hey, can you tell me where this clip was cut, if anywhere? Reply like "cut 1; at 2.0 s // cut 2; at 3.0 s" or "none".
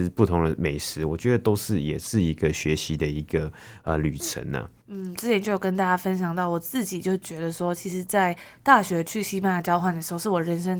cut 1; at 4.8 s